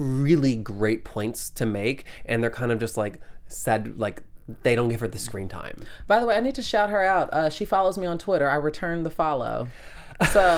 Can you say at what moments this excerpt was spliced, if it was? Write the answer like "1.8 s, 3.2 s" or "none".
none